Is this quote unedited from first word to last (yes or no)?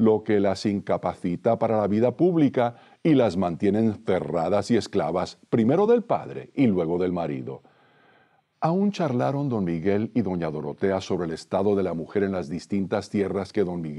yes